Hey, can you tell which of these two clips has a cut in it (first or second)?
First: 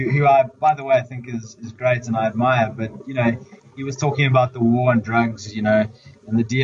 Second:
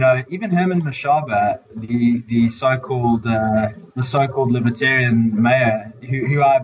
second